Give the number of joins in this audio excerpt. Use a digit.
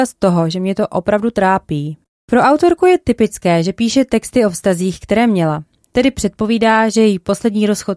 0